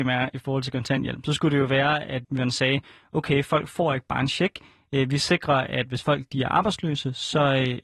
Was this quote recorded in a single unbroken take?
no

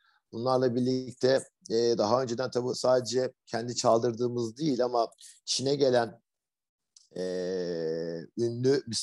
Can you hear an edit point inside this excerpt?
no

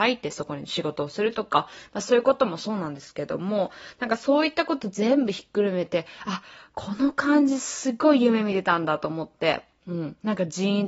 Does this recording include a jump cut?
no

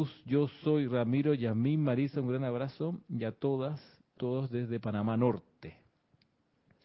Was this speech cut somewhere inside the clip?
yes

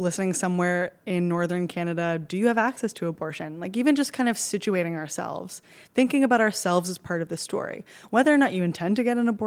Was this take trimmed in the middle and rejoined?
no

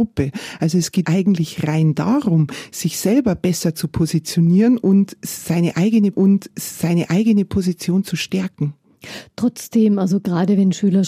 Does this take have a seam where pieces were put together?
yes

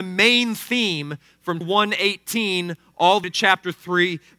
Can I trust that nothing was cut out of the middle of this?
no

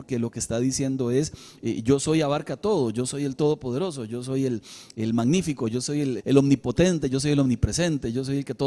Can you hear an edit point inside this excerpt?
yes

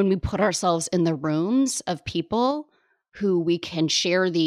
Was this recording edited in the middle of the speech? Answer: no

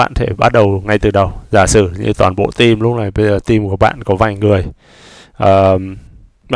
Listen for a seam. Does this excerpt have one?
no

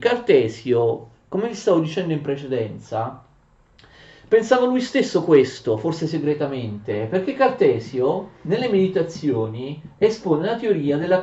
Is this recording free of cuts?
no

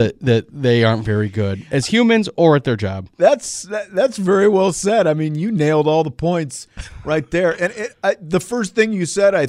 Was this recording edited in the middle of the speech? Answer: no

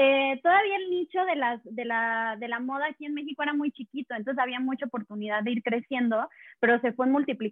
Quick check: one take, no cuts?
yes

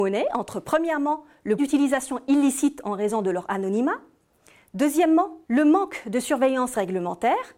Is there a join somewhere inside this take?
yes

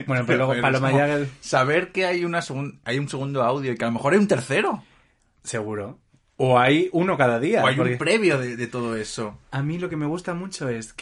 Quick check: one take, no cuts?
yes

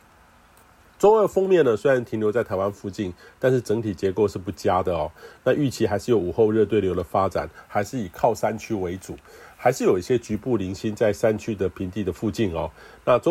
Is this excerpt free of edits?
yes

